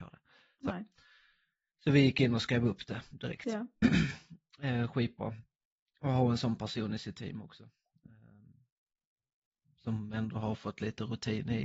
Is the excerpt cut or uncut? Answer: uncut